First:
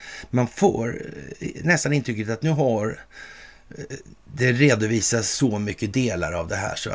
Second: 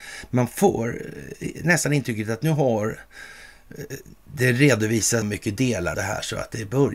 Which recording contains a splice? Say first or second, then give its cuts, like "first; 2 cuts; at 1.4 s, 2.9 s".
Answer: second; 2 cuts; at 5.2 s, 5.9 s